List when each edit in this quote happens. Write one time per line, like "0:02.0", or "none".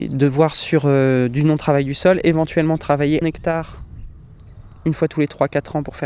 0:03.2